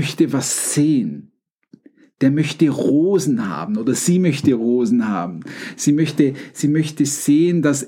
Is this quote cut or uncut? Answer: uncut